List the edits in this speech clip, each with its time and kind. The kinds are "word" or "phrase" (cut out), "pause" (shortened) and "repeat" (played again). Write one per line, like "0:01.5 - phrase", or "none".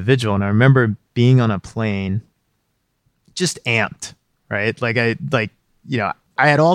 none